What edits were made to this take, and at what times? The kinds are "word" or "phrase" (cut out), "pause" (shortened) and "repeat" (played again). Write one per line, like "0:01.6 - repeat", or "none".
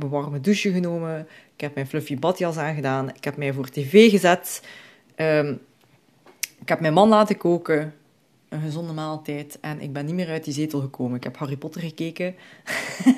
none